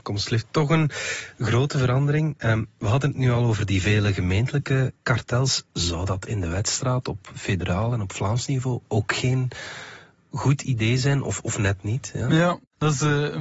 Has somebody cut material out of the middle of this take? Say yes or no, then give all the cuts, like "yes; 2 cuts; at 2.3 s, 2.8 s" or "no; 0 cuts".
no; 0 cuts